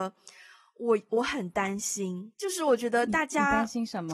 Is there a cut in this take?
yes; 1 cut; at 2.3 s

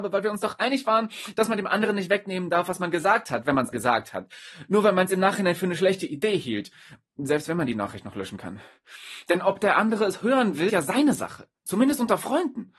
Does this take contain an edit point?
yes; 2 cuts; at 3.7 s, 10.7 s

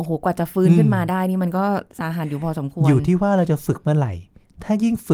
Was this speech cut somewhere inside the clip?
yes; 1 cut; at 1.9 s

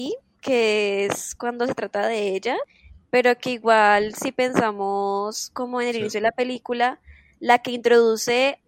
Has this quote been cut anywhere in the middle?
no; 0 cuts

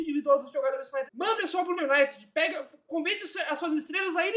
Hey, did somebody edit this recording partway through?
yes; 3 cuts; at 1.1 s, 1.4 s, 1.8 s

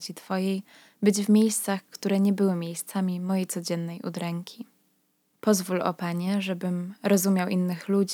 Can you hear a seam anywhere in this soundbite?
no; 0 cuts

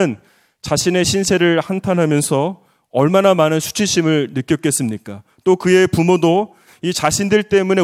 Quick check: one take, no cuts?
yes; 0 cuts

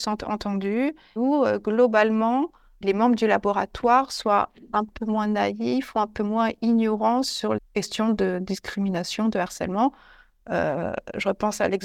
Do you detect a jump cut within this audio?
yes; 3 cuts; at 1.2 s, 2.8 s, 7.6 s

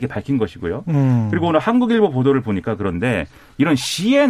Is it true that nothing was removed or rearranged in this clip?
yes; 0 cuts

